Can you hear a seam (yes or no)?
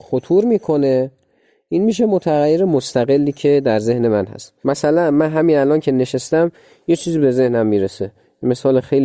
no